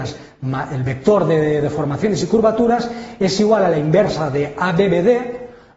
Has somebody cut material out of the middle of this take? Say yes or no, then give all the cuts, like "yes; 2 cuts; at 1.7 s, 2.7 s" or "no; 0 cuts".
no; 0 cuts